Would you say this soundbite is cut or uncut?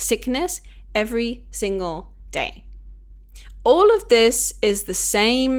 uncut